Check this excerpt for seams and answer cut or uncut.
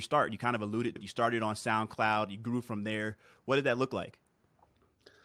cut